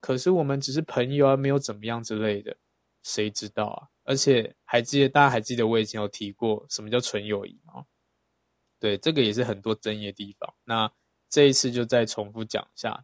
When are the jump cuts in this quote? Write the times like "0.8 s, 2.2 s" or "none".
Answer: 3.9 s